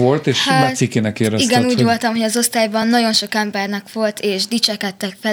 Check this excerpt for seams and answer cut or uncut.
uncut